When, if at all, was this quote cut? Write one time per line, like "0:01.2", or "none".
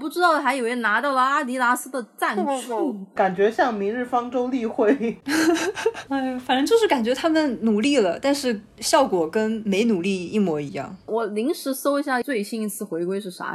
0:12.2